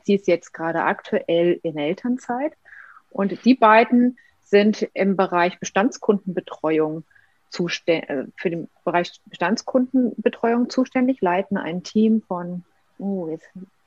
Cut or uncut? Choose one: uncut